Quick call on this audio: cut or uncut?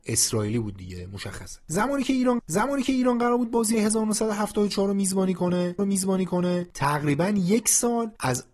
cut